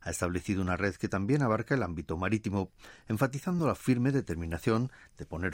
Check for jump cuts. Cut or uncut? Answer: uncut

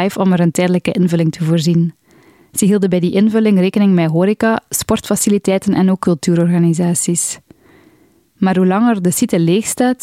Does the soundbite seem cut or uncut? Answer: uncut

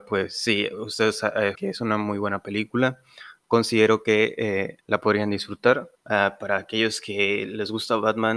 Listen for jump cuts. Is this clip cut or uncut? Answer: cut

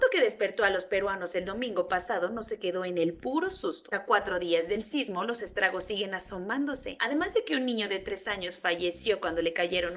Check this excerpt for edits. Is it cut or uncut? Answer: cut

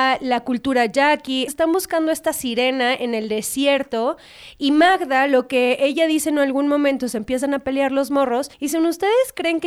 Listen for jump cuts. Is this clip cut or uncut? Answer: cut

